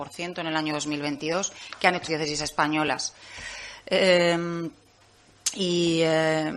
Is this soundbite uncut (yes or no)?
no